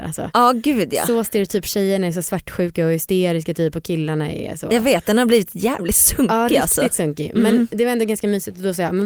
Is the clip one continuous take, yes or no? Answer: yes